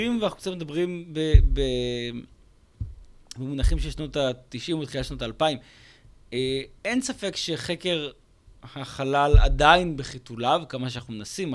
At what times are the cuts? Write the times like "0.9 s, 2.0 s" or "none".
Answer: 6.8 s